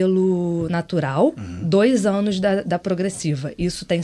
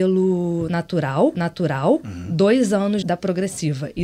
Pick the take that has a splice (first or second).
second